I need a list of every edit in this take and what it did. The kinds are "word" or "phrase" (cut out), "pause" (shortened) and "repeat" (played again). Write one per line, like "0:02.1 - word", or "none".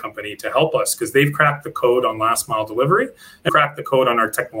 0:03.5 - word